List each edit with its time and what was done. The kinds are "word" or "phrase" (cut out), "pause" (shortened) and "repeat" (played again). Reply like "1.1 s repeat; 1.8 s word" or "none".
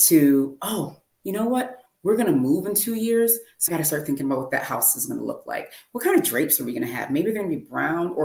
3.7 s word